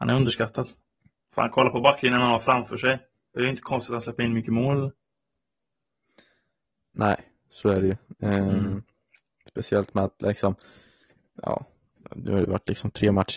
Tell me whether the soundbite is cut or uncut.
uncut